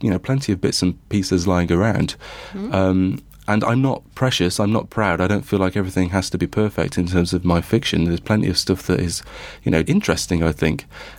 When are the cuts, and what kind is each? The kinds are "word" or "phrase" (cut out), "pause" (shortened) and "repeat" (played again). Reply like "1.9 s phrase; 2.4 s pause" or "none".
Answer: 9.8 s word